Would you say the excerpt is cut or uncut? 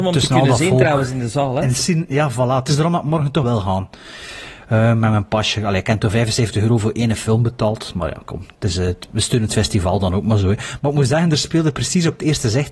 cut